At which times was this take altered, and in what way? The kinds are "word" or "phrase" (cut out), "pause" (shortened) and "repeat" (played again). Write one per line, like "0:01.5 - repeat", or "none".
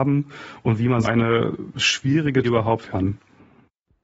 0:01.0 - word
0:02.4 - word
0:02.8 - word

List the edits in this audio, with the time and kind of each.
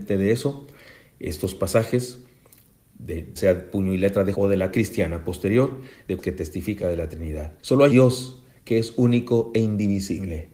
0:03.4 - word
0:04.3 - word
0:04.7 - word
0:06.2 - phrase
0:06.8 - word
0:07.6 - pause
0:07.9 - word

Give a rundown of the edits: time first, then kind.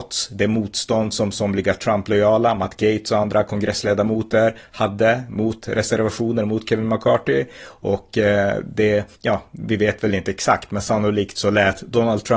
0:09.1 - pause

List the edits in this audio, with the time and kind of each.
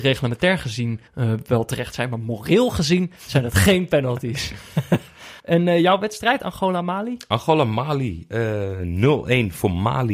0:01.1 - pause
0:05.4 - pause

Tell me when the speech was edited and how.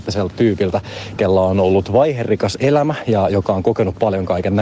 none

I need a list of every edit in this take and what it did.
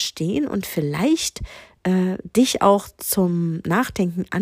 none

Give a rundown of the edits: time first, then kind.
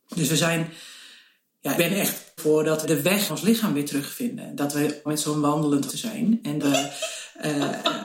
0:01.8 - word
0:02.4 - word
0:02.8 - word
0:03.3 - word
0:05.1 - word
0:05.9 - word
0:06.6 - word

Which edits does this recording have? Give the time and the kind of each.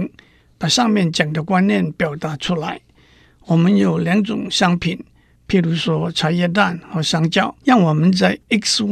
0:07.6 - pause

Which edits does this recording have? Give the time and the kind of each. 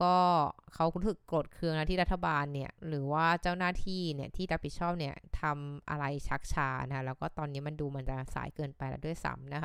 0:02.8 - pause

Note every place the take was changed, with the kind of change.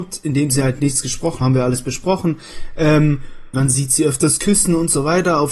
0:01.4 - word
0:03.5 - word

